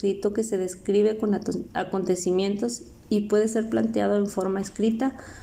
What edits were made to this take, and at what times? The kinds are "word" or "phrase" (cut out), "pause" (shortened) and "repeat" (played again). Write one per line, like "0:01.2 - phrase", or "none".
none